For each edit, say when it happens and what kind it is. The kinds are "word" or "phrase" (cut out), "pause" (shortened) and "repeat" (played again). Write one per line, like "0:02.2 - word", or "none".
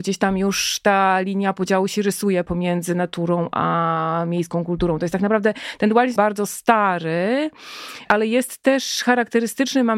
0:06.2 - word